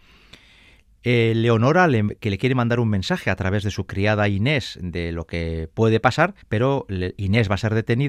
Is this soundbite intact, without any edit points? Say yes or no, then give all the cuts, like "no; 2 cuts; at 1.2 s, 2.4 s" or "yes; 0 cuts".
no; 1 cut; at 6.4 s